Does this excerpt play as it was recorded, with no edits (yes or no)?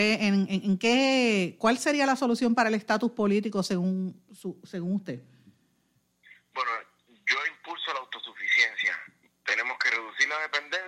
yes